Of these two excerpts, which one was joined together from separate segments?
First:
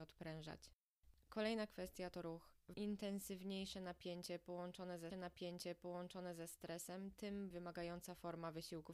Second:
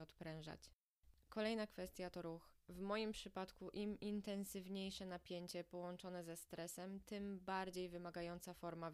first; 3 cuts; at 2.7 s, 5.1 s, 7.5 s

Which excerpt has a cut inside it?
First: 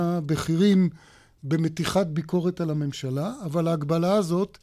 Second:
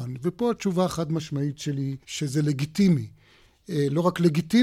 second; 1 cut; at 2.0 s

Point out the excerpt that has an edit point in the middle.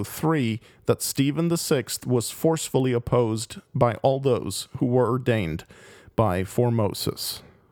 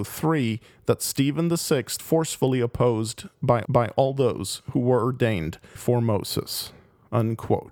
second; 3 cuts; at 2.0 s, 3.7 s, 5.8 s

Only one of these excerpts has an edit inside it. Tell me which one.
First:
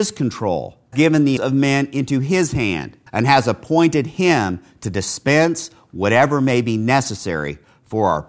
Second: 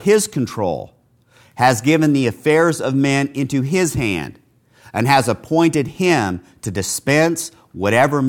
first; 3 cuts; at 0.9 s, 1.4 s, 3.1 s

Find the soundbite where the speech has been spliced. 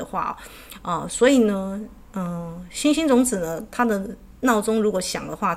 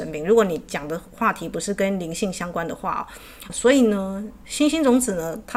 second; 2 cuts; at 3.5 s, 4.4 s

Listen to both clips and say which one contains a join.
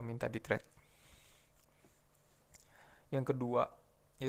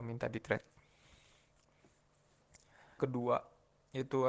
second; 1 cut; at 3.0 s

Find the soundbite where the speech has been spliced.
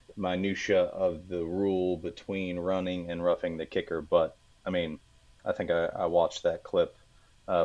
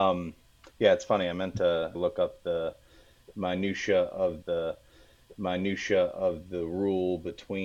second; 2 cuts; at 1.9 s, 4.4 s

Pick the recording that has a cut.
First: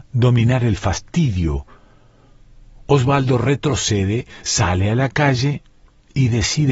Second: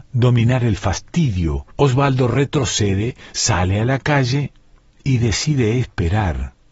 second; 1 cut; at 1.7 s

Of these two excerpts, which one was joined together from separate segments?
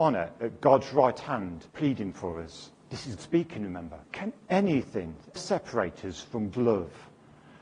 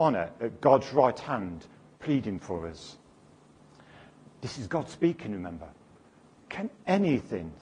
first; 6 cuts; at 1.7 s, 2.8 s, 3.2 s, 4.0 s, 5.4 s, 6.5 s

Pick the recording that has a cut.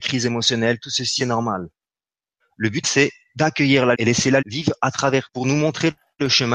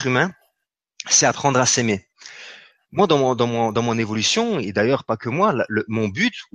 first; 5 cuts; at 1.2 s, 2.8 s, 3.9 s, 4.4 s, 5.3 s

